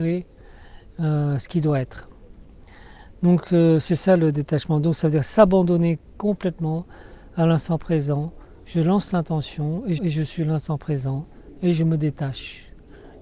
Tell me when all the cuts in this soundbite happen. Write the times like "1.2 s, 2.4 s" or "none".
10.0 s